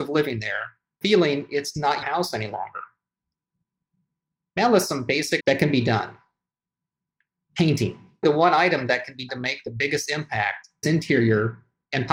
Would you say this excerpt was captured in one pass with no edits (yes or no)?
no